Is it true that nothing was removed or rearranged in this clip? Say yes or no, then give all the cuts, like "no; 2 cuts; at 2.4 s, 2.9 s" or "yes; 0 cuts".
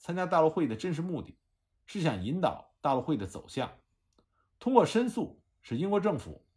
yes; 0 cuts